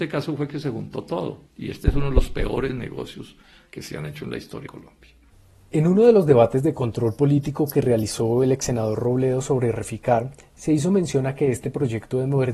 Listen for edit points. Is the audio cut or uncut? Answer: cut